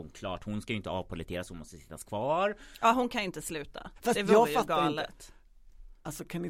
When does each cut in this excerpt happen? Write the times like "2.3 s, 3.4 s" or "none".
4.0 s